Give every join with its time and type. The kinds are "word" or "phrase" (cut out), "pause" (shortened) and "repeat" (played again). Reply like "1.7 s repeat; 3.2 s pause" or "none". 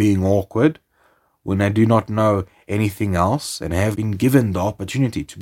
4.0 s word